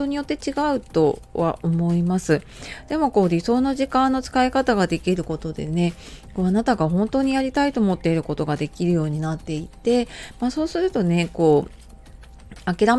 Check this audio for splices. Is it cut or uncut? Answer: uncut